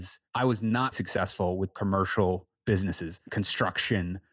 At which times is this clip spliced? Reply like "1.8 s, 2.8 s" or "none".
0.9 s, 1.7 s, 3.3 s